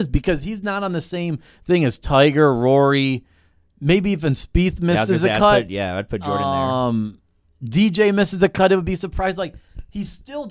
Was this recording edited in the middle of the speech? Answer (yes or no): no